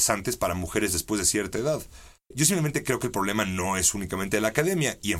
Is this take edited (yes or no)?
no